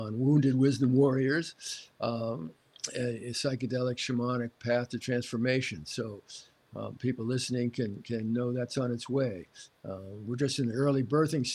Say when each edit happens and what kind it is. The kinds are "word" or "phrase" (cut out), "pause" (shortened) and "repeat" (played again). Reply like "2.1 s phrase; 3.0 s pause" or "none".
none